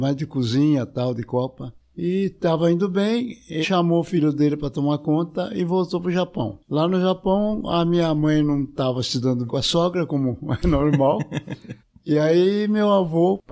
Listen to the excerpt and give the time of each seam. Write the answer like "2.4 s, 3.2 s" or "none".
3.6 s, 6.6 s, 9.5 s, 11.8 s